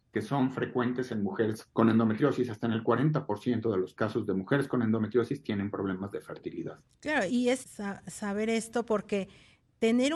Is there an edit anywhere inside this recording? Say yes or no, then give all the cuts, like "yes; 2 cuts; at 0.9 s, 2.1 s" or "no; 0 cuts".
yes; 3 cuts; at 1.7 s, 7.3 s, 7.6 s